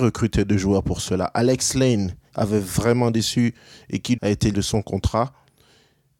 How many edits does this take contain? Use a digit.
3